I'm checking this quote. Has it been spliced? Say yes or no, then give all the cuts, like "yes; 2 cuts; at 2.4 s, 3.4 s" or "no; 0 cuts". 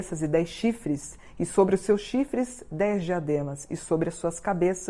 no; 0 cuts